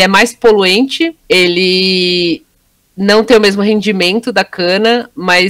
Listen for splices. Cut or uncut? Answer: cut